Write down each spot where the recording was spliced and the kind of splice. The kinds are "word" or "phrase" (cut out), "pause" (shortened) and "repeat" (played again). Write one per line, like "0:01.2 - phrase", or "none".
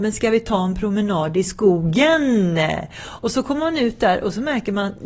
none